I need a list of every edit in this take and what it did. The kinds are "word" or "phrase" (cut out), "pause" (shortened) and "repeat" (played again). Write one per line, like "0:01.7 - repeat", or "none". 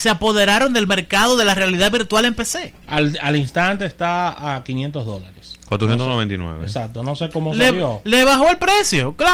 0:02.8 - pause